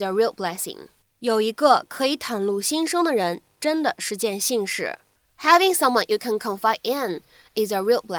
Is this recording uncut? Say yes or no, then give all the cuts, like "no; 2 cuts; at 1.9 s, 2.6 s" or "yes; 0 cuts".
no; 1 cut; at 1.0 s